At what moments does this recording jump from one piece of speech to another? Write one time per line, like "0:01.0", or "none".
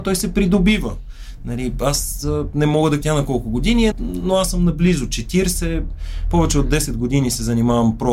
0:03.0
0:03.9